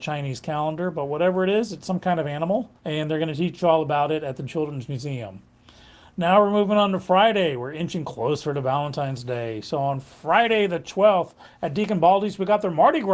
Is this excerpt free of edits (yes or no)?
no